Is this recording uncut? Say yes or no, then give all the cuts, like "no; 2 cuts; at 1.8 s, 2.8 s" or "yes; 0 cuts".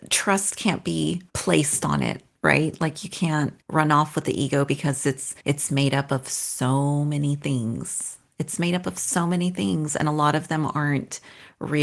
no; 3 cuts; at 1.3 s, 3.6 s, 5.4 s